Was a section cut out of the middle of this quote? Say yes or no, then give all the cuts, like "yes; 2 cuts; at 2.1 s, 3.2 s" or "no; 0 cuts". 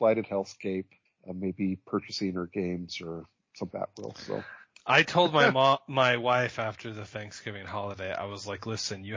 yes; 1 cut; at 3.7 s